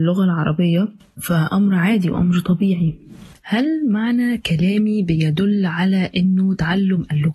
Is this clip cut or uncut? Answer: cut